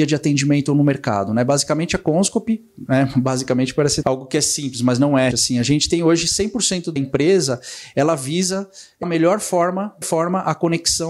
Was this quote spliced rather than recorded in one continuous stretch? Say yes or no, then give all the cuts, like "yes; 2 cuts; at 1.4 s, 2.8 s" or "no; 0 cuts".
yes; 5 cuts; at 4.0 s, 5.3 s, 7.0 s, 9.0 s, 10.0 s